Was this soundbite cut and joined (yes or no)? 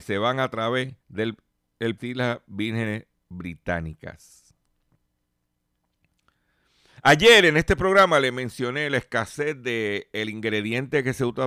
yes